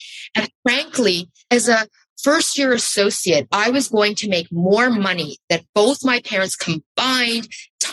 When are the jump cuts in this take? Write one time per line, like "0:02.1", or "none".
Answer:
none